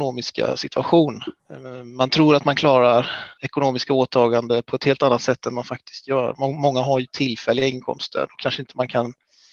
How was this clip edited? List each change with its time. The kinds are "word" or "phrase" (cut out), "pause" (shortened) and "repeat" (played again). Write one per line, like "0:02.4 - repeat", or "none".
0:03.3 - pause